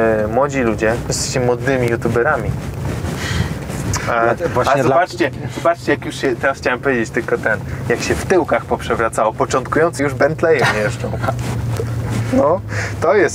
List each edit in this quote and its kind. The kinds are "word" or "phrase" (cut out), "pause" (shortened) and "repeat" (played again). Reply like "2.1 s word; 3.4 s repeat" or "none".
10.0 s word

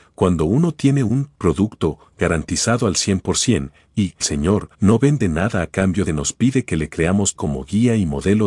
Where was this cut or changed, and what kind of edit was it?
4.2 s phrase; 4.7 s pause; 6.1 s phrase; 7.3 s word

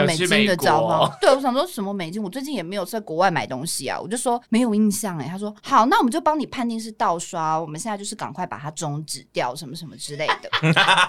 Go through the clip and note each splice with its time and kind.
4.4 s pause; 5.6 s pause

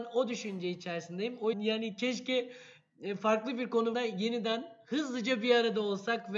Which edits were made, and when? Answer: 1.5 s phrase; 3.9 s word

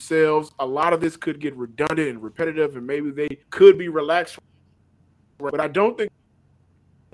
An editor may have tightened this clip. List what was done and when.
3.4 s pause

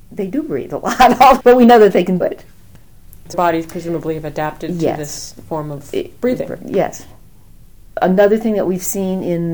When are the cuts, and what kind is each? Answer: 1.4 s word; 2.2 s word; 3.3 s word

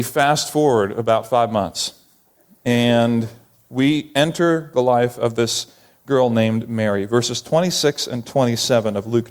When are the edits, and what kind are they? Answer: none

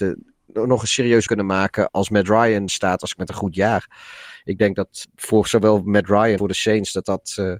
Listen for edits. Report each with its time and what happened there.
1.3 s word; 1.9 s word; 2.7 s word; 3.2 s word; 5.0 s word; 6.4 s word

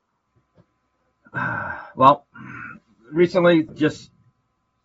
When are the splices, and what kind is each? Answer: 3.7 s word

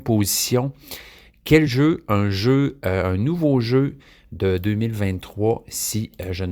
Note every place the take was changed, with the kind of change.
none

